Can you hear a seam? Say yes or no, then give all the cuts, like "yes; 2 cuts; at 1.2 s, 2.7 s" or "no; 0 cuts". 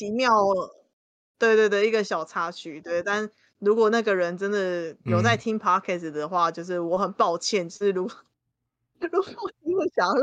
no; 0 cuts